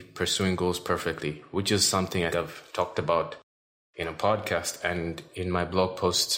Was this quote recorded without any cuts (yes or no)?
no